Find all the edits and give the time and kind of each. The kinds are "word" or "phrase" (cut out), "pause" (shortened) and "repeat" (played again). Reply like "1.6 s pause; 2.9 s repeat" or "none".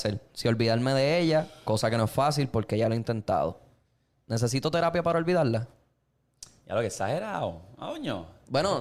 none